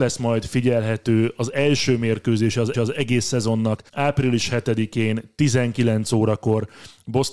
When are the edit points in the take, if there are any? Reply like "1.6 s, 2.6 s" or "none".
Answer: 2.7 s, 3.9 s